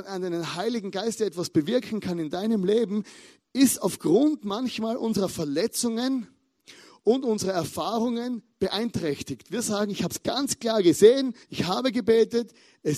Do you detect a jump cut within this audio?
yes; 1 cut; at 11.4 s

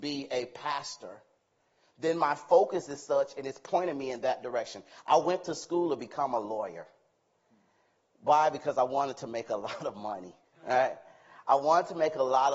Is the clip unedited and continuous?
yes; 0 cuts

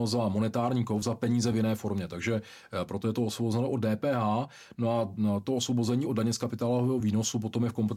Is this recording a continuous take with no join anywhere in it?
yes; 0 cuts

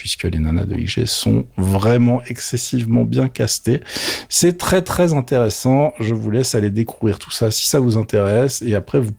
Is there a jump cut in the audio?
no; 0 cuts

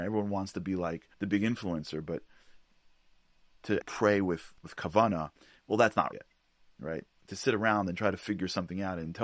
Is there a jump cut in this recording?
yes; 4 cuts; at 1.1 s, 3.8 s, 4.6 s, 6.1 s

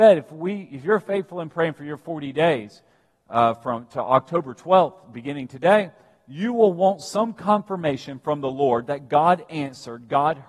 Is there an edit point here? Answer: no; 0 cuts

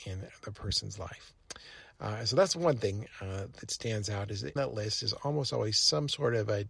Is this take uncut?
no; 1 cut; at 4.6 s

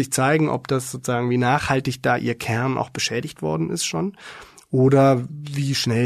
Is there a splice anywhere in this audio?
no; 0 cuts

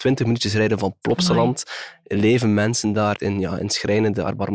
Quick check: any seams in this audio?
yes; 1 cut; at 3.2 s

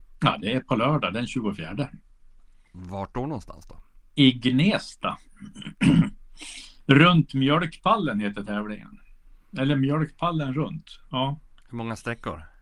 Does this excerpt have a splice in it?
no; 0 cuts

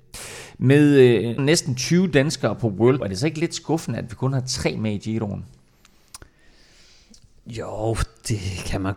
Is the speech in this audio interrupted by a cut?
yes; 2 cuts; at 1.4 s, 3.0 s

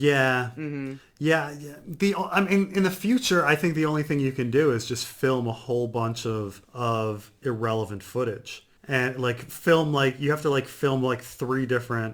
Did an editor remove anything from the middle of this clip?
yes; 2 cuts; at 6.6 s, 8.8 s

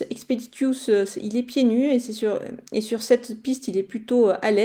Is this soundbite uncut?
yes; 0 cuts

